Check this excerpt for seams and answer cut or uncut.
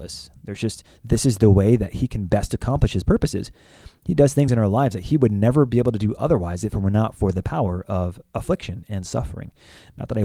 uncut